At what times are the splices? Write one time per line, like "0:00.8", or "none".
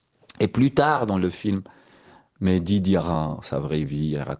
none